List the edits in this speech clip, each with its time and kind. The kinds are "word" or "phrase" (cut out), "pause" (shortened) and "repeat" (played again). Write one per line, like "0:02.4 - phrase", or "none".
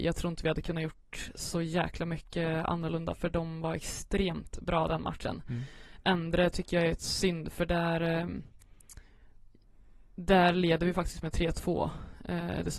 none